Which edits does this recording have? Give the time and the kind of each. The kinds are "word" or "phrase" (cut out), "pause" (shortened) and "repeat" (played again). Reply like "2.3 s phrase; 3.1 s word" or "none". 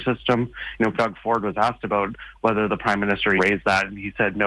0.9 s word; 3.4 s word